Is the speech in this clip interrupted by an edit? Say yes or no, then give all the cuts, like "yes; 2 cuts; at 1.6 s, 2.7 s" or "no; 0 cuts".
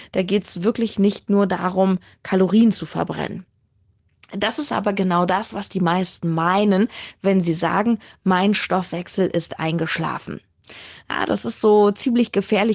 no; 0 cuts